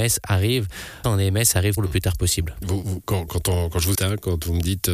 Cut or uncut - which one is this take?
cut